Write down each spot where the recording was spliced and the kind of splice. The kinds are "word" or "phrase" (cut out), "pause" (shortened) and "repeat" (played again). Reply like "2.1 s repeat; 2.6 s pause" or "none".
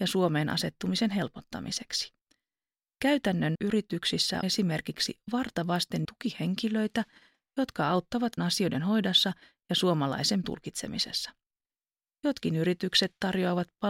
3.5 s word; 4.4 s word; 6.0 s word; 8.4 s word; 10.4 s word